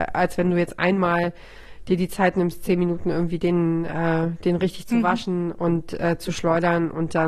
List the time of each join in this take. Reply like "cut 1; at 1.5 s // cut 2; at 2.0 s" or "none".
none